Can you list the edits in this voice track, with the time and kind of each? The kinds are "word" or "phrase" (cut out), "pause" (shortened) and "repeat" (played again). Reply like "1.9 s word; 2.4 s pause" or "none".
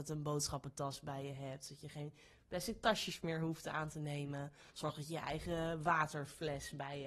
4.7 s pause